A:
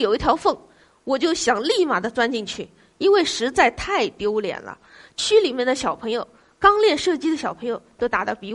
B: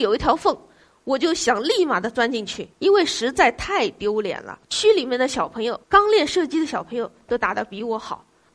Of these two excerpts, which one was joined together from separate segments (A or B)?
B